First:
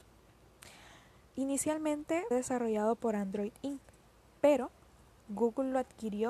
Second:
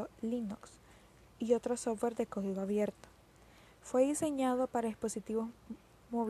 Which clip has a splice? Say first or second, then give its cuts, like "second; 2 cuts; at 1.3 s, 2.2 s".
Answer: first; 1 cut; at 2.3 s